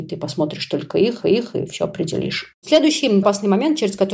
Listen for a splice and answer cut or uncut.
cut